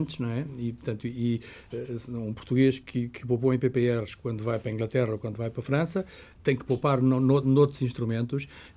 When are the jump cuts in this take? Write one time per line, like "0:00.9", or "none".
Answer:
none